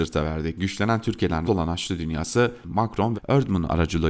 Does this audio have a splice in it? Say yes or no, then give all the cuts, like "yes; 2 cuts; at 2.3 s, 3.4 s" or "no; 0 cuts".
yes; 3 cuts; at 1.4 s, 2.6 s, 3.1 s